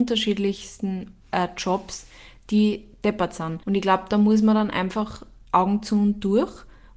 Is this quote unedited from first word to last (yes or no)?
no